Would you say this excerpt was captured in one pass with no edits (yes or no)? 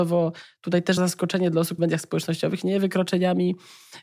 no